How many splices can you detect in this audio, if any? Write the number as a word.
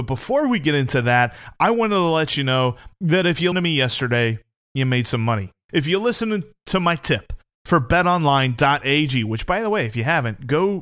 one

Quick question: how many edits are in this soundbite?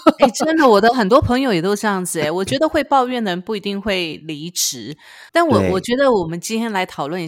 one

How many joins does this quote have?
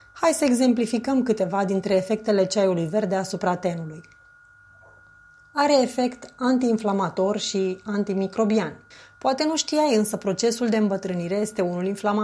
one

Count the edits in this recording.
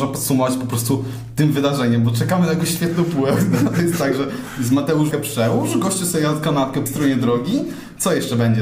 two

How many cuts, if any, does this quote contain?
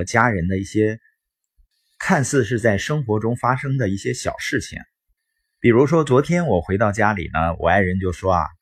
zero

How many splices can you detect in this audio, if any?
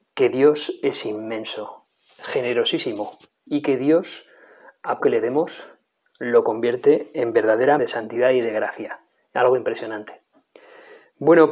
three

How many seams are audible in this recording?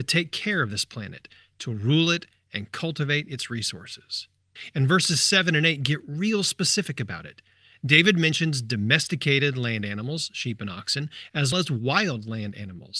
one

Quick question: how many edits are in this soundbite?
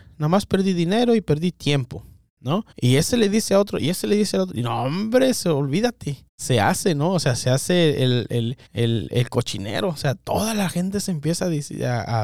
three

